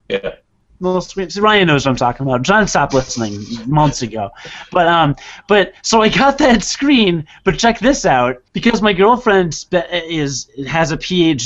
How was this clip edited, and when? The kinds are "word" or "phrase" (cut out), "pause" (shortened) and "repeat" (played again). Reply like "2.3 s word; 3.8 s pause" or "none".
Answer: 8.5 s pause